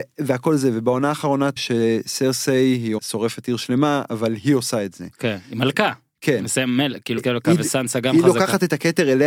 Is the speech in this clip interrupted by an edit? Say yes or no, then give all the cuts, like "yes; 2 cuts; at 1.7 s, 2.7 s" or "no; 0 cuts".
yes; 3 cuts; at 1.6 s, 3.0 s, 7.2 s